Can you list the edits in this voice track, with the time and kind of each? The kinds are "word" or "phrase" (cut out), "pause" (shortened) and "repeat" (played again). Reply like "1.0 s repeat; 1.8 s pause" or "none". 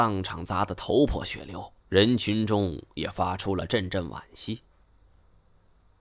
1.8 s pause